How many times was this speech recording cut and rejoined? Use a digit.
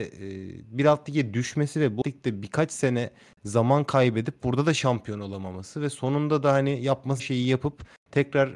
2